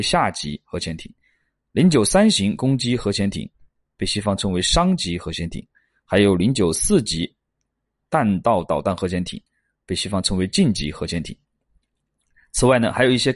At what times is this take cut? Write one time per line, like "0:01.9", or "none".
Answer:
none